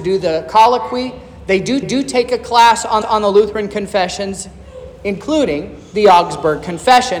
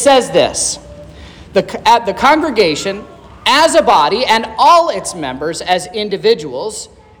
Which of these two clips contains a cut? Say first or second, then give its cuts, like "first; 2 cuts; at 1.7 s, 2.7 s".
first; 2 cuts; at 1.8 s, 3.0 s